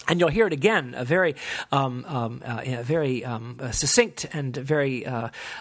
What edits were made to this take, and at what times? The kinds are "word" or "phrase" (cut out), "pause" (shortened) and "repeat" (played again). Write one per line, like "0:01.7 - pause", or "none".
none